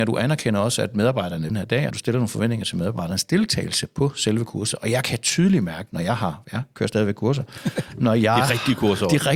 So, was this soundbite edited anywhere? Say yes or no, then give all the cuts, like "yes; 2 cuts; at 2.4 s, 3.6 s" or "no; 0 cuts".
yes; 2 cuts; at 1.5 s, 1.9 s